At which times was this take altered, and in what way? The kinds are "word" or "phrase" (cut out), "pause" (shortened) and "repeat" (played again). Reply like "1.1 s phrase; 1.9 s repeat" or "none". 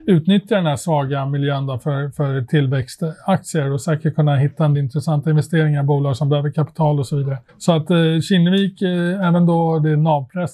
4.7 s word; 7.5 s pause